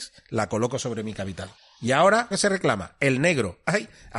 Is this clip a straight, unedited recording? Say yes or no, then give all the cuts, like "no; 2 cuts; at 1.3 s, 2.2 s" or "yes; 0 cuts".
no; 2 cuts; at 1.6 s, 2.3 s